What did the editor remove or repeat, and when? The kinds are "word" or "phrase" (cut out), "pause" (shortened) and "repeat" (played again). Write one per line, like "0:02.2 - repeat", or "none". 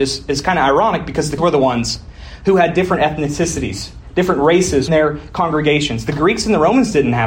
0:01.4 - word
0:04.9 - word